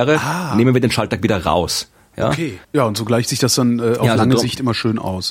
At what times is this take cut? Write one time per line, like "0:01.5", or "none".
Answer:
0:02.6